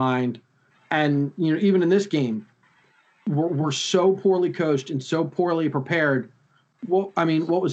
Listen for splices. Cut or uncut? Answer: uncut